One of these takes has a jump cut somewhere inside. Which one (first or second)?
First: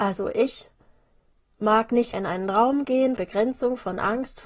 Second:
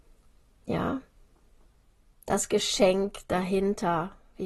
first